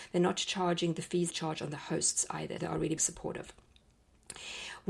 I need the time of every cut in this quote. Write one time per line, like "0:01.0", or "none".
0:01.3
0:02.6
0:03.0